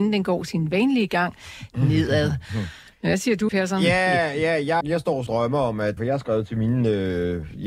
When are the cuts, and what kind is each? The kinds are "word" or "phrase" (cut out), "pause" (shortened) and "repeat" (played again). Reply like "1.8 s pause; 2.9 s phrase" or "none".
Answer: 3.5 s word; 4.8 s word; 5.3 s word; 6.0 s word